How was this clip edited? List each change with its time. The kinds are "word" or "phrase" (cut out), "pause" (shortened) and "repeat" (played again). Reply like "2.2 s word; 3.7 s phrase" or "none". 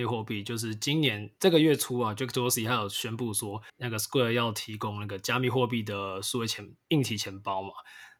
3.7 s pause

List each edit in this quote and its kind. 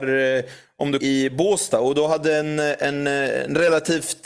1.0 s phrase

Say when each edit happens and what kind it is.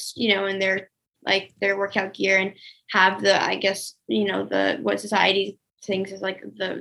none

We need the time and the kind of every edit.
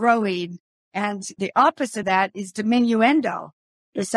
2.0 s word

